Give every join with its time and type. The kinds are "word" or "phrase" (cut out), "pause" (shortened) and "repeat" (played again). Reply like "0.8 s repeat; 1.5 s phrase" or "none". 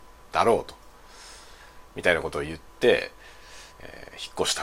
1.9 s pause; 3.7 s pause